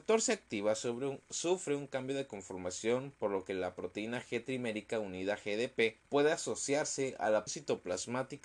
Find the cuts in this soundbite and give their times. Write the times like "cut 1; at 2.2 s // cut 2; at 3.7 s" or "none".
cut 1; at 6.0 s // cut 2; at 7.5 s